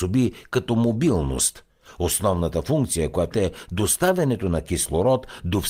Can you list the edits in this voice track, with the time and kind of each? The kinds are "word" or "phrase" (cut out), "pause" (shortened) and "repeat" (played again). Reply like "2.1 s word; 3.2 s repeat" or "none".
3.3 s word